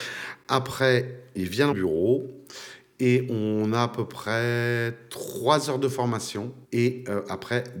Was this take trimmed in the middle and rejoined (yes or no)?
yes